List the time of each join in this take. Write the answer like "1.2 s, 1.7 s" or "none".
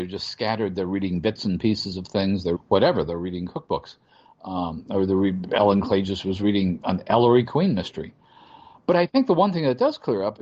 2.5 s, 5.5 s

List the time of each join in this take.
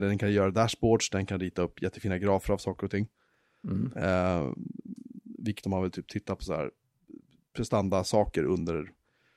5.6 s

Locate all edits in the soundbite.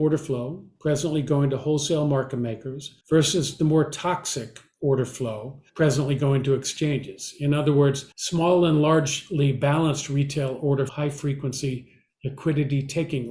3.0 s, 5.7 s, 8.1 s, 10.9 s

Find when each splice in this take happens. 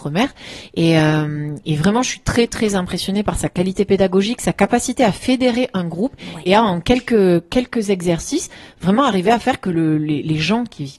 none

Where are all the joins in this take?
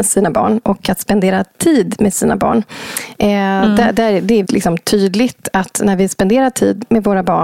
4.4 s

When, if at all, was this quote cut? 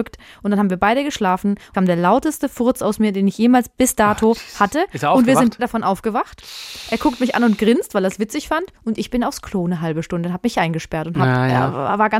1.7 s, 5.6 s

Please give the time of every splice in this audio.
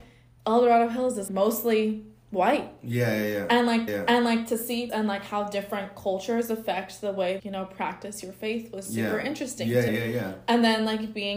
1.3 s, 3.9 s, 4.9 s, 7.4 s, 9.9 s

